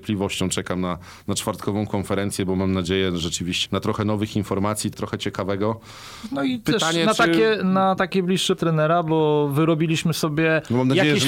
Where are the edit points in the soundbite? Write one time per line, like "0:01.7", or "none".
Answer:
0:03.7
0:04.9
0:08.6